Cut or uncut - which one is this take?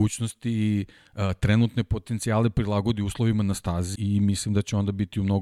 cut